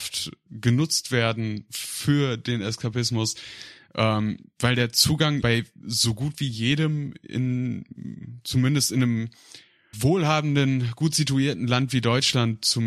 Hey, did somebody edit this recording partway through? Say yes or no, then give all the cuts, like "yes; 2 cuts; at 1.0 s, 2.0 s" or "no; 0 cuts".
yes; 2 cuts; at 5.4 s, 9.9 s